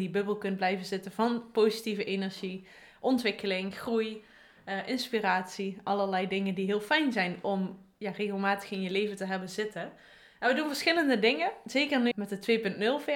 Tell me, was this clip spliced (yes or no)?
yes